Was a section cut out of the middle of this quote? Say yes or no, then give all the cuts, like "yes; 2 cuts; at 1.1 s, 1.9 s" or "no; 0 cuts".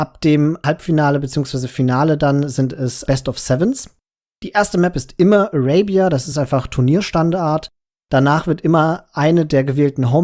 no; 0 cuts